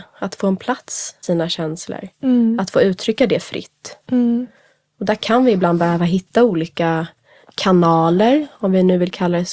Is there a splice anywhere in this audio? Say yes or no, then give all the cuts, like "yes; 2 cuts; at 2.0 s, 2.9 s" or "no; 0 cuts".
yes; 1 cut; at 1.2 s